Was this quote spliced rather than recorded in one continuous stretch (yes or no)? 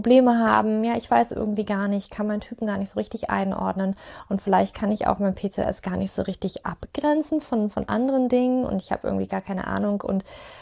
no